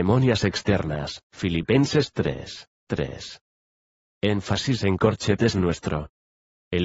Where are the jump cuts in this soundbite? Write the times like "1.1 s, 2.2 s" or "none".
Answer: 1.2 s, 2.7 s